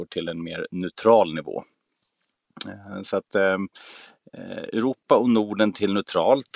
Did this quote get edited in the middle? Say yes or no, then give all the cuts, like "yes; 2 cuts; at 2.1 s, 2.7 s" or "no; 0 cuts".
no; 0 cuts